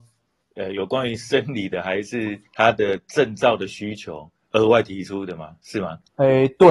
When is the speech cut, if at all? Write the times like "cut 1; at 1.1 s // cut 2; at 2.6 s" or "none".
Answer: cut 1; at 2.5 s